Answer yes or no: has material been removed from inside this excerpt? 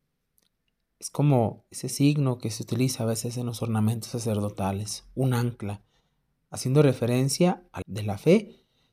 yes